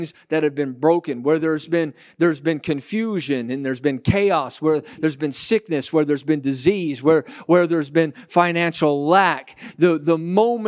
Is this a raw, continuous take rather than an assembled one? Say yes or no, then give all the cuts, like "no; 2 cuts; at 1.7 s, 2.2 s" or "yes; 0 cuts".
yes; 0 cuts